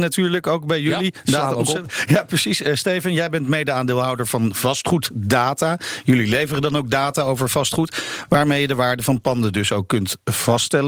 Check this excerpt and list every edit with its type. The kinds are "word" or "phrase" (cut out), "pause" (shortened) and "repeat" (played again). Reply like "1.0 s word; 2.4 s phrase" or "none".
none